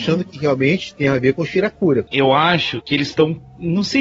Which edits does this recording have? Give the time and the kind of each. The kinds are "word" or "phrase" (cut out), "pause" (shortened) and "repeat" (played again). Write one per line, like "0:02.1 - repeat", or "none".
none